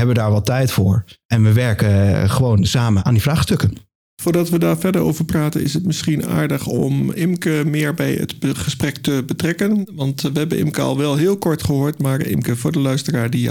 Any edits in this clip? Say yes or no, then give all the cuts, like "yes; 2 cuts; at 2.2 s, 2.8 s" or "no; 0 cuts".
no; 0 cuts